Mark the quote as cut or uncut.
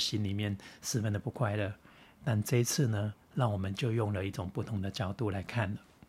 uncut